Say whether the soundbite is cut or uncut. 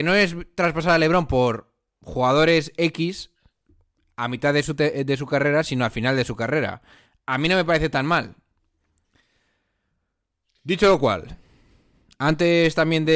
uncut